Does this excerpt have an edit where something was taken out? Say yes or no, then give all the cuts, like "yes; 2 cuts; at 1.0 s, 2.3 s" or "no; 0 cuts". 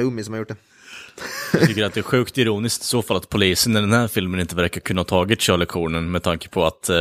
no; 0 cuts